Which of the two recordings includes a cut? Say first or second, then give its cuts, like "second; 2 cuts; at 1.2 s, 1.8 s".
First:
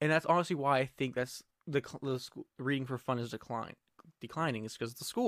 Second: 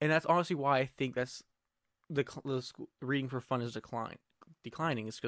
first; 1 cut; at 1.6 s